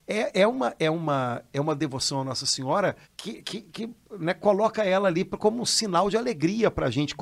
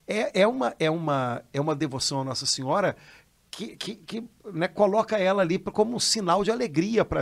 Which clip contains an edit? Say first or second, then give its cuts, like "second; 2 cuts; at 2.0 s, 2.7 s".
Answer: first; 1 cut; at 3.0 s